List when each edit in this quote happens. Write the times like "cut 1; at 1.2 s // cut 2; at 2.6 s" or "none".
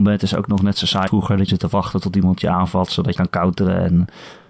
cut 1; at 1.1 s // cut 2; at 1.5 s // cut 3; at 3.1 s